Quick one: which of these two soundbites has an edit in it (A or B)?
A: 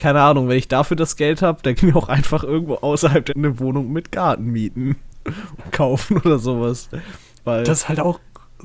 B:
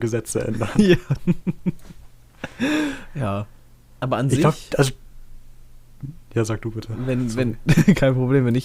A